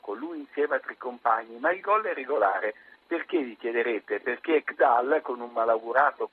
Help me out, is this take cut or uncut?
uncut